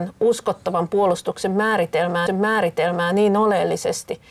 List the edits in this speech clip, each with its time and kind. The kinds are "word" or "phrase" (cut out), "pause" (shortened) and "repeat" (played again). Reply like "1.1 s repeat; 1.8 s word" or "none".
2.3 s repeat